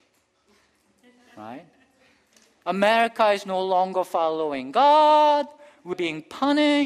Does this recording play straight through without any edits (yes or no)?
no